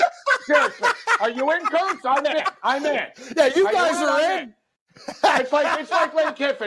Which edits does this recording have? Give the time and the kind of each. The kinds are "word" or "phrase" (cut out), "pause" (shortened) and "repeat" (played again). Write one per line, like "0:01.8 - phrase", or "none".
none